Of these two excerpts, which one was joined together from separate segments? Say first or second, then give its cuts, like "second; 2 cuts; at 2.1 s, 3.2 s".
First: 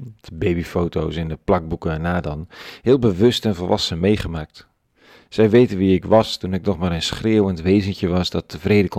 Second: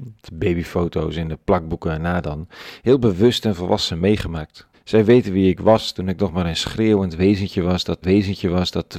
second; 2 cuts; at 4.7 s, 8.0 s